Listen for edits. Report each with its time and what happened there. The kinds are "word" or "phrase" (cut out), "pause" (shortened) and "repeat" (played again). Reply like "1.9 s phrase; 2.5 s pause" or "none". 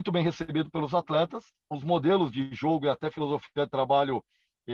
none